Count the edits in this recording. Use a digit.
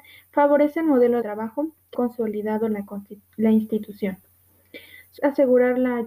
3